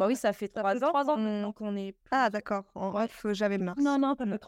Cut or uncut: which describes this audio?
cut